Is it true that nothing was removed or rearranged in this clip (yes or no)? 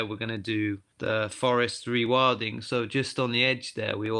no